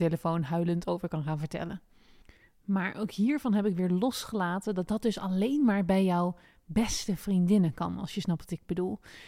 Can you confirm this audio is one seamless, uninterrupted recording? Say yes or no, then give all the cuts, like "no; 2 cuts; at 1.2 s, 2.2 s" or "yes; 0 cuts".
yes; 0 cuts